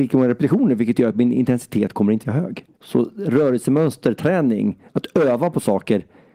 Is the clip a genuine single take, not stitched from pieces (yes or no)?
no